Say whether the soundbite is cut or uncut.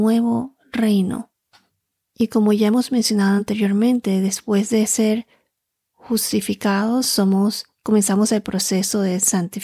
uncut